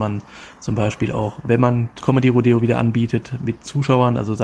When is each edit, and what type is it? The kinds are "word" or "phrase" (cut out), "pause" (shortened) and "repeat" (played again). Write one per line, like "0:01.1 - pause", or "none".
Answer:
0:02.0 - phrase